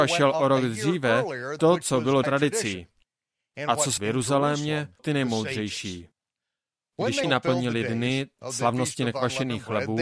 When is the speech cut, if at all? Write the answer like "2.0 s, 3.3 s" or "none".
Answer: 1.6 s, 2.2 s, 4.0 s, 5.0 s, 7.2 s